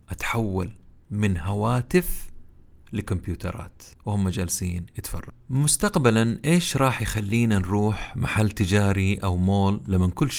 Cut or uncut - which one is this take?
cut